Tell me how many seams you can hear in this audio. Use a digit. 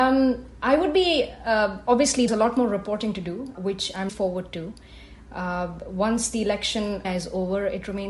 4